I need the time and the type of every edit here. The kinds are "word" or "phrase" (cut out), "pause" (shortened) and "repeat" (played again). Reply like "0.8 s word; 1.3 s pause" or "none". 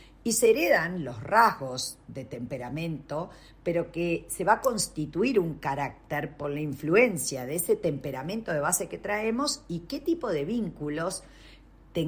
none